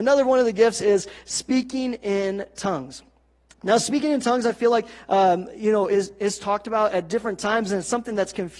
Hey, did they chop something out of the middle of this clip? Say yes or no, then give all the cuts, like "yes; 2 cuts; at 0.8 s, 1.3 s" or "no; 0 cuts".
no; 0 cuts